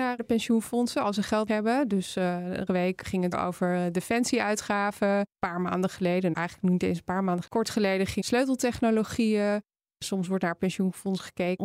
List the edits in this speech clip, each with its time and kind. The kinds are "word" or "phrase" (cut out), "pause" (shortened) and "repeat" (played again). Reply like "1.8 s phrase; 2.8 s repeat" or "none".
1.5 s word; 2.7 s word; 3.3 s word; 5.3 s pause; 6.3 s word; 7.5 s word; 8.2 s phrase